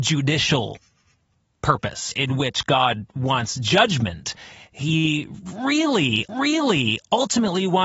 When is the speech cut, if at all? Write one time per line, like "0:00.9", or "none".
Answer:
0:02.1
0:03.1
0:06.3